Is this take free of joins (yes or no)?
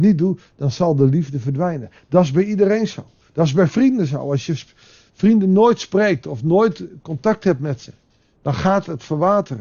yes